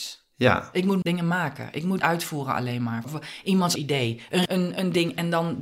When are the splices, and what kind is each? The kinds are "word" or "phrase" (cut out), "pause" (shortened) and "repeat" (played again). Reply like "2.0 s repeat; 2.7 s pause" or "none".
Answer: 1.0 s word; 2.0 s word; 3.0 s word; 3.8 s word; 4.5 s word